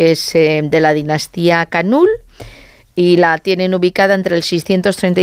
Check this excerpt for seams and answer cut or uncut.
uncut